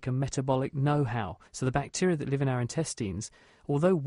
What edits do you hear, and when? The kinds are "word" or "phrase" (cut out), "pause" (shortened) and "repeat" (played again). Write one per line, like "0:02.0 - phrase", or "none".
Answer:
0:01.5 - pause